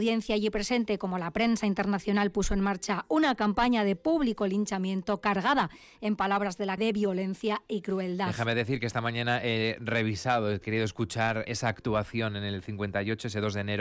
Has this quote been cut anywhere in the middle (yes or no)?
yes